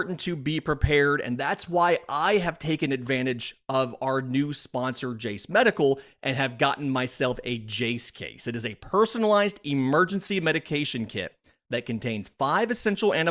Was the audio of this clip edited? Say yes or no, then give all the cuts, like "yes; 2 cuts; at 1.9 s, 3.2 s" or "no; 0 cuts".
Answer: no; 0 cuts